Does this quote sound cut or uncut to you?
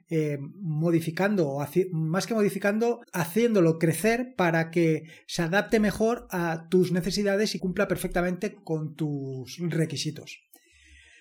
cut